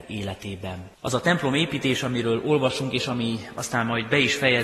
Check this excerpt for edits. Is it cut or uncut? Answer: cut